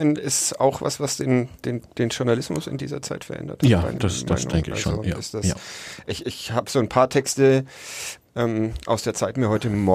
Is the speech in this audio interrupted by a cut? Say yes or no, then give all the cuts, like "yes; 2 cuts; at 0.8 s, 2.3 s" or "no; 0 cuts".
no; 0 cuts